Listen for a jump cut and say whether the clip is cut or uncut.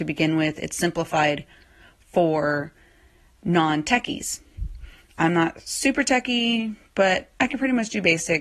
uncut